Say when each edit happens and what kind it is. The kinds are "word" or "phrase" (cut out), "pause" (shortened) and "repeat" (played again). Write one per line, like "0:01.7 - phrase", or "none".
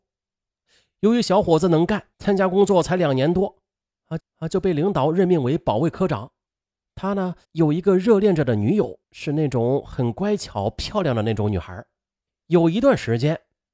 0:02.1 - pause
0:04.2 - repeat
0:07.4 - pause
0:09.0 - pause
0:12.3 - pause